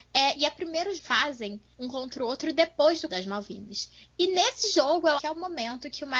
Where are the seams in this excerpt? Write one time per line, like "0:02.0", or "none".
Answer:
0:01.0
0:01.7
0:03.1
0:05.2